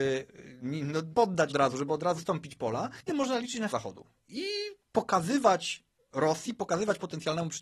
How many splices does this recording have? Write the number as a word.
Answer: six